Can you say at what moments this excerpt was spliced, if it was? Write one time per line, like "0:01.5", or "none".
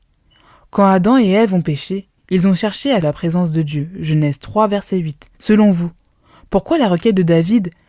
0:02.2
0:03.0
0:05.3